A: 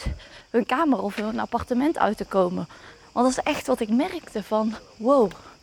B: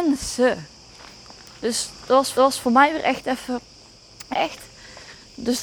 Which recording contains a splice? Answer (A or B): B